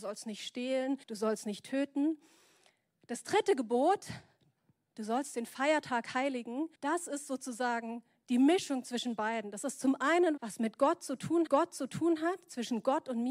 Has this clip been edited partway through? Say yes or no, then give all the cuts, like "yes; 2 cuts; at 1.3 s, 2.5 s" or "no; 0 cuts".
yes; 4 cuts; at 1.0 s, 6.7 s, 10.4 s, 11.5 s